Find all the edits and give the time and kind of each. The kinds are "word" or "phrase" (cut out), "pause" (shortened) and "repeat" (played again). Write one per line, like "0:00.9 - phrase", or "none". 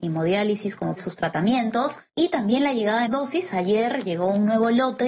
0:01.0 - phrase
0:02.1 - pause
0:03.1 - word